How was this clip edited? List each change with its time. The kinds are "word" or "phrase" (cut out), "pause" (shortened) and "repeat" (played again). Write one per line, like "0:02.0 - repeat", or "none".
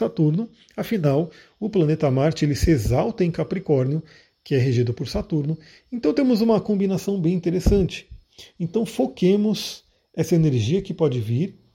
none